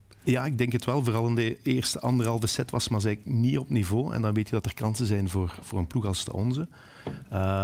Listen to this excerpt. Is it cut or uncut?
uncut